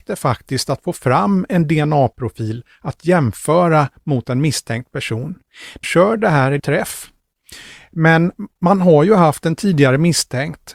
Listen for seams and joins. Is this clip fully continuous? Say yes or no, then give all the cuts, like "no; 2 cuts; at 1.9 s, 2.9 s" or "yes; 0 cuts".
no; 2 cuts; at 5.8 s, 6.6 s